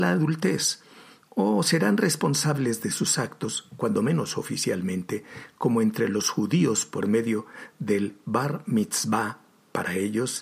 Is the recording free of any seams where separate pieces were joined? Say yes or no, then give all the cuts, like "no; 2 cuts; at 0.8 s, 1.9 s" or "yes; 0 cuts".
yes; 0 cuts